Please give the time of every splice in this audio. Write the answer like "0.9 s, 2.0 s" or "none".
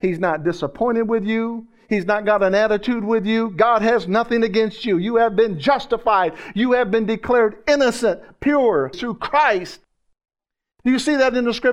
8.9 s